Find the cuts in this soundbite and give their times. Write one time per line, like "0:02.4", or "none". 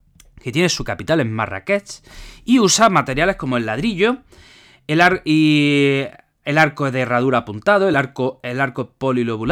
none